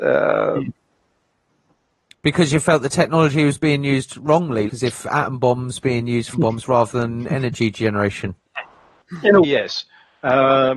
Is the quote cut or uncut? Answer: cut